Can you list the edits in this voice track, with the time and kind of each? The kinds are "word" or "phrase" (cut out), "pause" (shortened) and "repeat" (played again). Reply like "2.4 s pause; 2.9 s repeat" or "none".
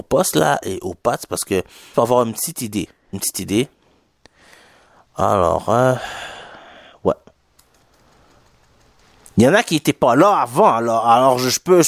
1.9 s word; 3.1 s word